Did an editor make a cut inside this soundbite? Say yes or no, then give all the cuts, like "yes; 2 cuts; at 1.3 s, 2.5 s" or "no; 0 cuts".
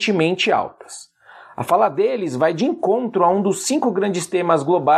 no; 0 cuts